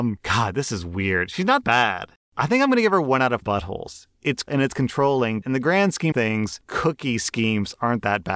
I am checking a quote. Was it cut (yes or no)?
yes